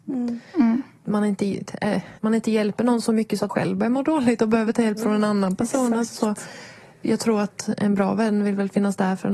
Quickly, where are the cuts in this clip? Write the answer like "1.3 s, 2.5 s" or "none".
2.2 s, 3.5 s